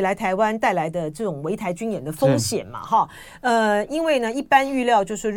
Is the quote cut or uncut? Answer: uncut